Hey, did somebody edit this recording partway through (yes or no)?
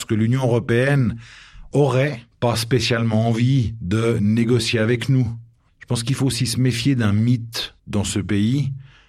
yes